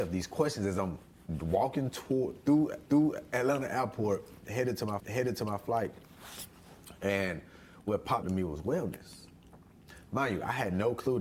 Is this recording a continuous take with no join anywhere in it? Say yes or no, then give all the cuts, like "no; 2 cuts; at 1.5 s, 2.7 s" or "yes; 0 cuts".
no; 3 cuts; at 2.9 s, 5.0 s, 8.2 s